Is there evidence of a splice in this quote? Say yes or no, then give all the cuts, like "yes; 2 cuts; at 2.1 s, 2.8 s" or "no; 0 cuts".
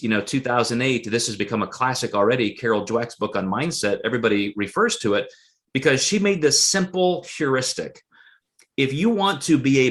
no; 0 cuts